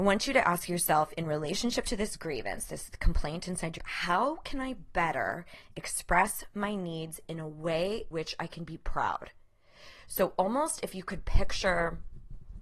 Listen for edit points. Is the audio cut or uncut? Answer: cut